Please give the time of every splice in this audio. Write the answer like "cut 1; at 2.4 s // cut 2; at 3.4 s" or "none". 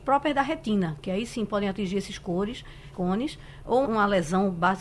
cut 1; at 2.9 s // cut 2; at 3.8 s